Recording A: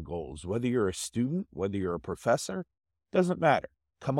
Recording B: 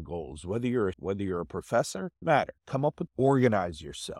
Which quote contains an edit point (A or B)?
B